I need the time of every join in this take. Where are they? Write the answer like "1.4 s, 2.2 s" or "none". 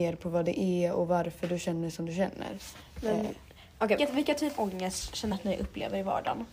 4.0 s, 4.6 s, 5.3 s